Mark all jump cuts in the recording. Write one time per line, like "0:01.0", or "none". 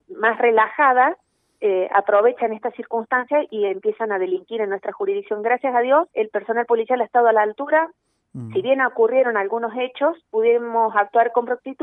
0:06.1
0:10.2